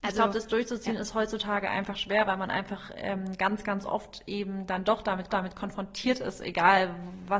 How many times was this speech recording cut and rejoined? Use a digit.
1